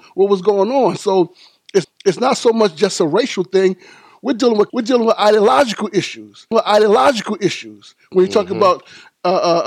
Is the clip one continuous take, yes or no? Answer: no